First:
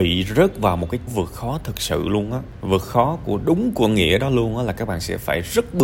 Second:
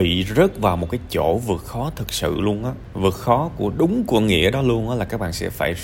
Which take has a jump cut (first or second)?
first